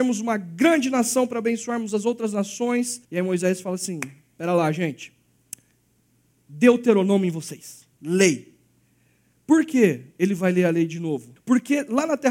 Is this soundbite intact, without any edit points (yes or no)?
no